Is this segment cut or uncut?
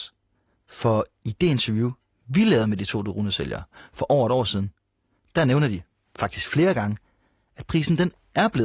uncut